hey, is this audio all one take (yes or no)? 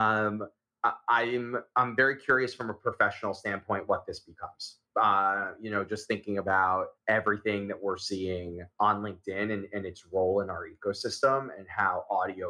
no